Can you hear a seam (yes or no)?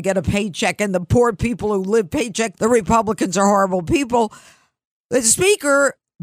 yes